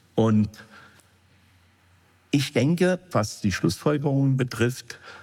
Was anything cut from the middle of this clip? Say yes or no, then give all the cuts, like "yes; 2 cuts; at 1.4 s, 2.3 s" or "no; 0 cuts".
yes; 1 cut; at 3.1 s